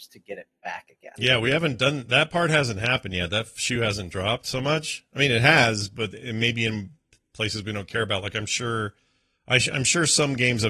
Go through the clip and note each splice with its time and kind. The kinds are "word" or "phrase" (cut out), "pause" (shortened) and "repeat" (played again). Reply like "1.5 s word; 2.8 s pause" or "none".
none